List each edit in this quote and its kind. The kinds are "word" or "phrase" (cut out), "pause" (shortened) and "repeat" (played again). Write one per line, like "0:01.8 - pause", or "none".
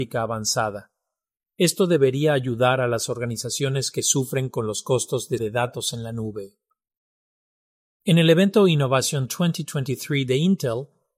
0:05.4 - word